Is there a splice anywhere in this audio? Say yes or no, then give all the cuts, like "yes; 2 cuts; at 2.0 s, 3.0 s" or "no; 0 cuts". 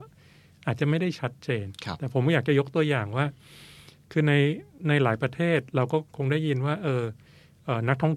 no; 0 cuts